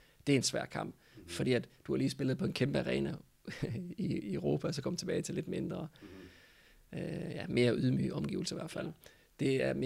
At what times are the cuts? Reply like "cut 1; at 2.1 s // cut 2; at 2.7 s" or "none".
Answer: none